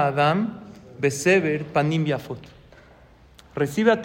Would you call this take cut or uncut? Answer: uncut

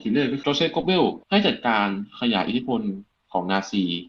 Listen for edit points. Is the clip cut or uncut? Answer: cut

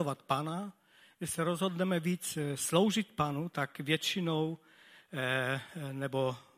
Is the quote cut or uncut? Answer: uncut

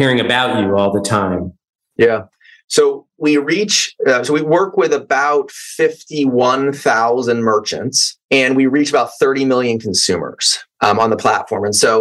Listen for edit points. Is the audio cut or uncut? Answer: uncut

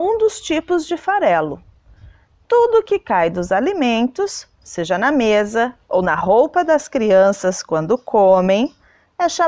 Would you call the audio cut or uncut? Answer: uncut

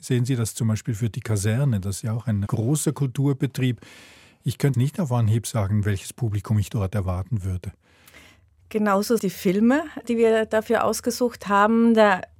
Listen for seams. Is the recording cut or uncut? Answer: cut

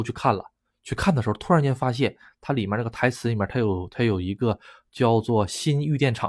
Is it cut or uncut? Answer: uncut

